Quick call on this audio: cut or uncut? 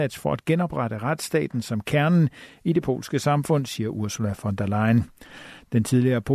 uncut